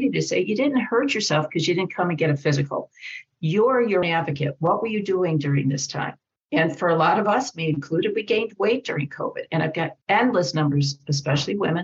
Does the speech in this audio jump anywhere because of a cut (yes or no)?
yes